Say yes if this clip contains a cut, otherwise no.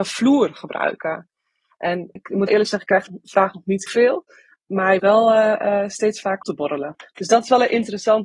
yes